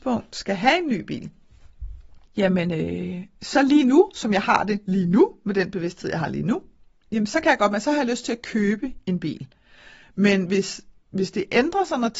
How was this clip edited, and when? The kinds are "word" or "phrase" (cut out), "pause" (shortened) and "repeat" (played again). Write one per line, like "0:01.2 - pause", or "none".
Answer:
0:02.2 - pause